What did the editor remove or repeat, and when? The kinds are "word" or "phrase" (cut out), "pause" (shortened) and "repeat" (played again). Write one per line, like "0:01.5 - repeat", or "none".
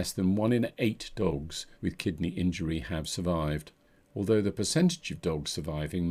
0:01.7 - pause
0:03.9 - pause